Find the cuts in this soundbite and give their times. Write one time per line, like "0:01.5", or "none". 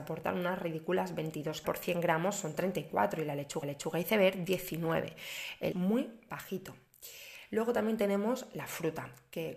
0:01.6
0:03.6
0:05.7